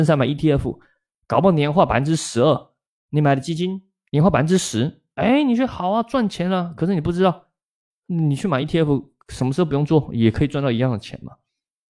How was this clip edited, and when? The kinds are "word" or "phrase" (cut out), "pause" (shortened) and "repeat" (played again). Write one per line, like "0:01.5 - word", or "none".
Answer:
none

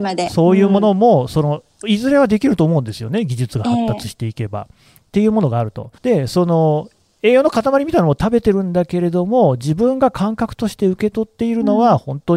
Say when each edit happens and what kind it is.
0:06.0 - pause

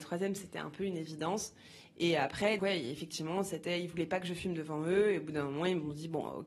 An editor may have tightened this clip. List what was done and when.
0:02.6 - word

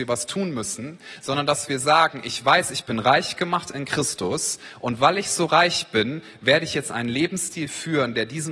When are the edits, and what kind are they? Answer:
none

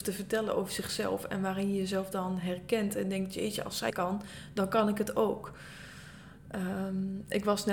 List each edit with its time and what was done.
0:03.9 - word

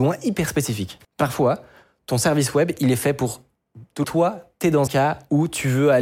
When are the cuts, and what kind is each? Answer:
0:01.0 - pause
0:04.0 - phrase
0:04.9 - word

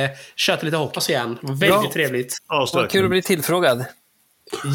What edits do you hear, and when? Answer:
0:01.0 - word
0:02.7 - word

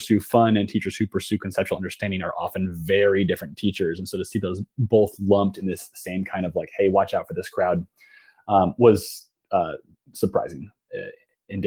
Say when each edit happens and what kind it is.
none

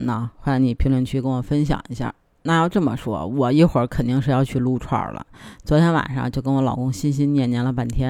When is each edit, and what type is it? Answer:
0:02.3 - pause

